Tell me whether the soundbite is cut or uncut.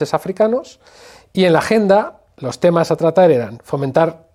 uncut